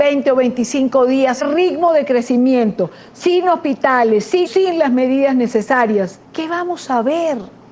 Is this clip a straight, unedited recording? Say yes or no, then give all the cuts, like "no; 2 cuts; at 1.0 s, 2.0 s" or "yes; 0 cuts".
no; 3 cuts; at 1.4 s, 4.5 s, 6.2 s